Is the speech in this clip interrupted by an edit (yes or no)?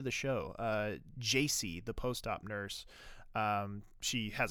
no